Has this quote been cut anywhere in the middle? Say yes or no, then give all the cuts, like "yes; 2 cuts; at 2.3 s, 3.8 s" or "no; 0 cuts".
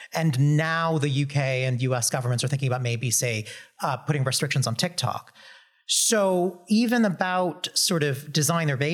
no; 0 cuts